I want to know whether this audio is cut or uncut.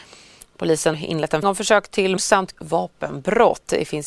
cut